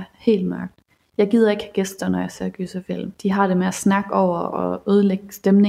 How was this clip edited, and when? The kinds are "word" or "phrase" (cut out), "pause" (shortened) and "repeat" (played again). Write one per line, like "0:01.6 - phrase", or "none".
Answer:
0:03.2 - pause